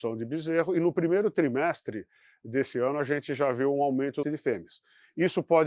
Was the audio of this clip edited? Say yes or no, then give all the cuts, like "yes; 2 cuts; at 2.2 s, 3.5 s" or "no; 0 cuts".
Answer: yes; 1 cut; at 4.2 s